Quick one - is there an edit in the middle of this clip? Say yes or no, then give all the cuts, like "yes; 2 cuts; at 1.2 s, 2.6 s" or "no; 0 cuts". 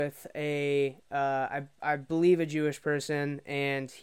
no; 0 cuts